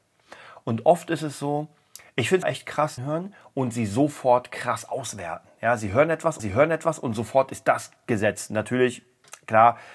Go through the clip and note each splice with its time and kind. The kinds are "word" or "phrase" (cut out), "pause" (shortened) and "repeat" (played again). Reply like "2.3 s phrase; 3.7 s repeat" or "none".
2.4 s word; 3.0 s phrase; 6.4 s repeat